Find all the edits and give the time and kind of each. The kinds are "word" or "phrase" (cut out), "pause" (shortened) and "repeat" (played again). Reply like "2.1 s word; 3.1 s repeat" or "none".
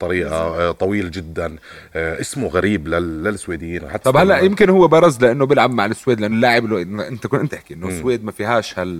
4.0 s word; 6.3 s word; 7.5 s phrase